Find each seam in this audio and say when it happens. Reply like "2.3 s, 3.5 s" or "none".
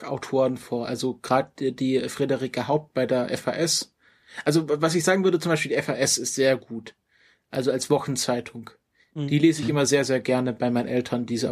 none

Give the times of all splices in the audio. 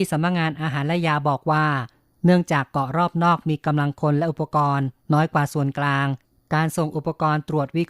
none

